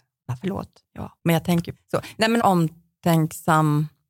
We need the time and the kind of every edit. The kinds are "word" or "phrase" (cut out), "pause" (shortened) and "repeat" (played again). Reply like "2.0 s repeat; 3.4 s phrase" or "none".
1.2 s pause; 1.7 s word; 2.4 s phrase